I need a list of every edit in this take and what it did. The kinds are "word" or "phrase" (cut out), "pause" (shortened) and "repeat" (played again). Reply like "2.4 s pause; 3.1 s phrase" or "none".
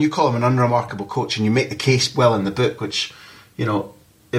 none